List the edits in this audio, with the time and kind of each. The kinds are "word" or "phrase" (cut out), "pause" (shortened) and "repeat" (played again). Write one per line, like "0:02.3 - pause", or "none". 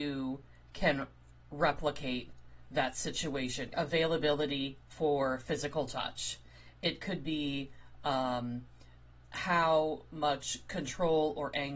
0:03.7 - phrase